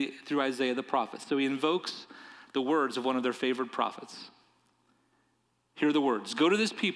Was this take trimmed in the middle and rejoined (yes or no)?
no